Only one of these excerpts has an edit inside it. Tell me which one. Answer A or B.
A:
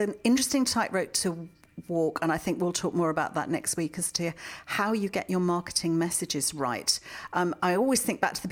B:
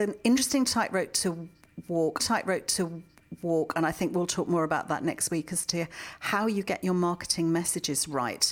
B